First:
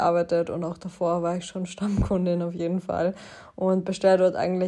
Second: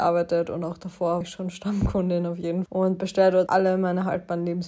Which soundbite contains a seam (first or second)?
second